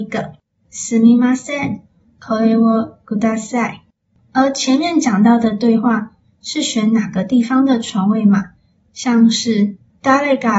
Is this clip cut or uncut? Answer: uncut